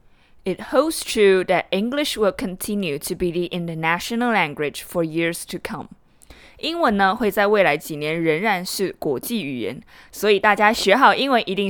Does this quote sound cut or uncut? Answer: uncut